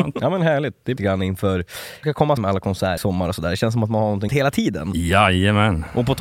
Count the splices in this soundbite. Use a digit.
5